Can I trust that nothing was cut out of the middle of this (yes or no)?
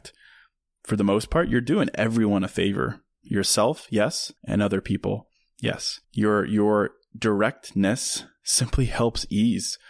no